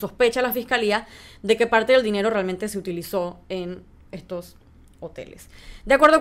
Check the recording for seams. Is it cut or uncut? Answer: uncut